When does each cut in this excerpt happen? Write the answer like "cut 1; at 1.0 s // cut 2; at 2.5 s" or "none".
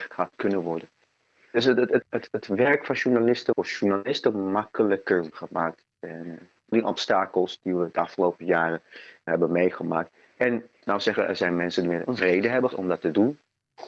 cut 1; at 2.0 s // cut 2; at 3.5 s // cut 3; at 5.3 s // cut 4; at 6.7 s // cut 5; at 9.3 s // cut 6; at 10.8 s // cut 7; at 12.1 s // cut 8; at 12.7 s

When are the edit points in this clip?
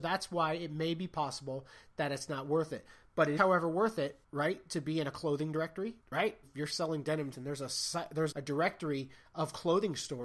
cut 1; at 3.4 s // cut 2; at 4.2 s // cut 3; at 6.0 s // cut 4; at 6.4 s // cut 5; at 7.3 s // cut 6; at 8.3 s

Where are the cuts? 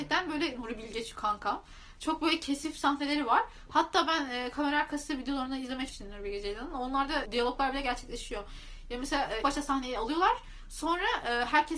cut 1; at 5.9 s // cut 2; at 7.2 s // cut 3; at 9.4 s

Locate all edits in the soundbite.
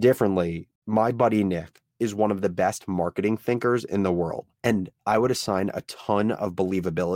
cut 1; at 4.5 s

